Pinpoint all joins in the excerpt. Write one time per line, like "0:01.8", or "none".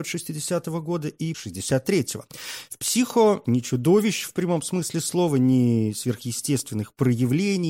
0:01.3
0:03.4